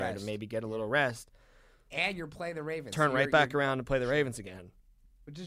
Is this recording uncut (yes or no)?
yes